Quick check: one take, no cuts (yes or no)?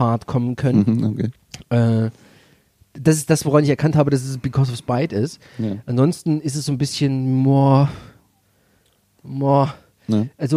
yes